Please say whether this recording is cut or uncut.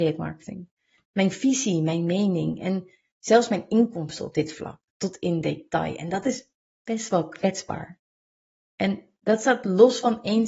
uncut